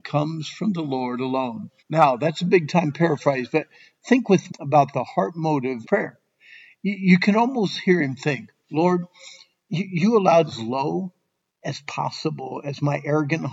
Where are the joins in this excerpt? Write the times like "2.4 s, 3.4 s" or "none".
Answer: 1.8 s, 4.5 s, 5.8 s, 10.5 s